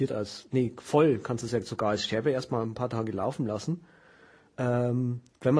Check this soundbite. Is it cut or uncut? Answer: uncut